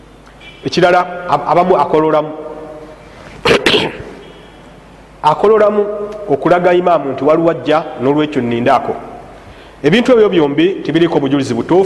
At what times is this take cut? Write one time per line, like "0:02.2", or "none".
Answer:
none